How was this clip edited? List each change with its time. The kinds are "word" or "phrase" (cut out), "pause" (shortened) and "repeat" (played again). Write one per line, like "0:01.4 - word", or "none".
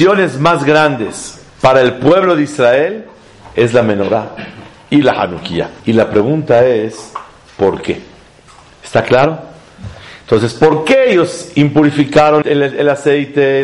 0:01.5 - pause
0:05.8 - pause
0:12.4 - word